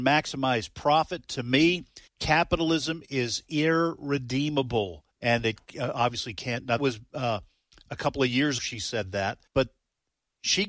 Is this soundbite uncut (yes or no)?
no